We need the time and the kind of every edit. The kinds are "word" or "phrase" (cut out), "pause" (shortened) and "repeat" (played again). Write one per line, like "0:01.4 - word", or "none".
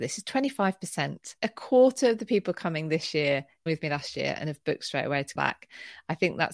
0:01.4 - word
0:03.7 - word
0:05.4 - word